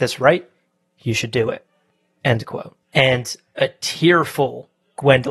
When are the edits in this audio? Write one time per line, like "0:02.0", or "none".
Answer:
0:02.8

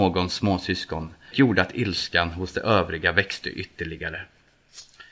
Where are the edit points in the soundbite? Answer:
0:01.3

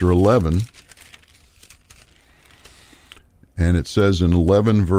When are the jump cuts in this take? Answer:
none

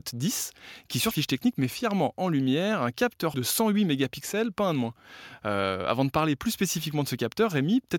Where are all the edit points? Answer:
0:01.1
0:03.3

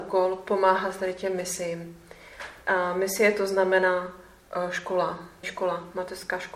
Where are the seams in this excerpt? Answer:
0:05.4

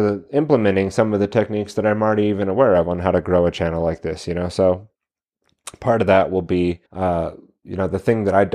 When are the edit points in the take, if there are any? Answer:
0:06.9

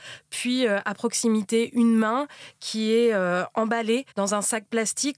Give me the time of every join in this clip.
0:04.1

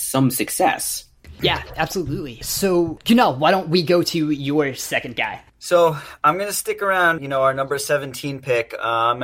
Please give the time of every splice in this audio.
0:07.2

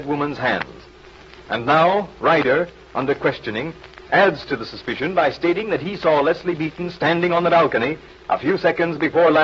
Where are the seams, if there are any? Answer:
none

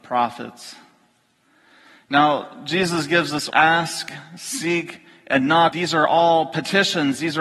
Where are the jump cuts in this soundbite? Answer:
0:03.5
0:05.7

